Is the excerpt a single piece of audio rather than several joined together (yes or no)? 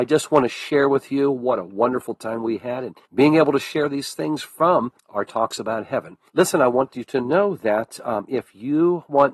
no